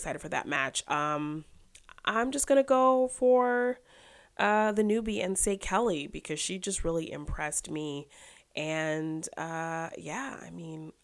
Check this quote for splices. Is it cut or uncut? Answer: uncut